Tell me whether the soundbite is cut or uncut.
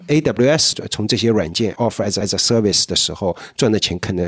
cut